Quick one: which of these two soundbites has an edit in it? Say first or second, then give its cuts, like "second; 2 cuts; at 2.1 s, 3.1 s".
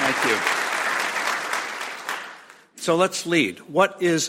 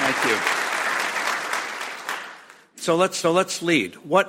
second; 1 cut; at 3.2 s